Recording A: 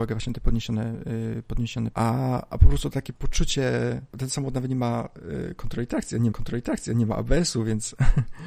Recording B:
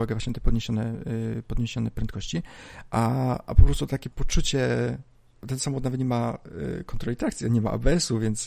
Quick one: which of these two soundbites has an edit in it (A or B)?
A